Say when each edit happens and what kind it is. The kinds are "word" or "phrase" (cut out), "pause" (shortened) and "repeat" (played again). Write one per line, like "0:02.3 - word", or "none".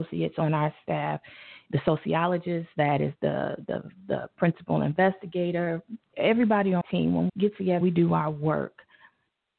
0:03.2 - word
0:03.7 - word
0:06.1 - word
0:06.8 - word
0:07.3 - word
0:07.8 - word